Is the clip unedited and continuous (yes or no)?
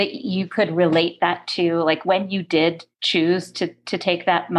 no